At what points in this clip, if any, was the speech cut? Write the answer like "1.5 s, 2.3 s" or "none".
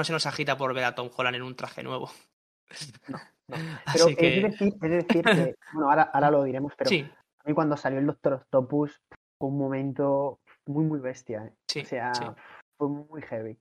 none